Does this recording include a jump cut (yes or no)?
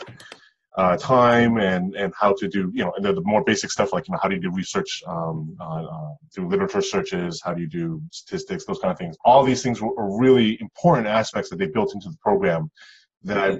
yes